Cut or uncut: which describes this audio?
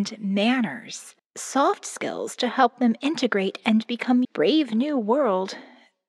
cut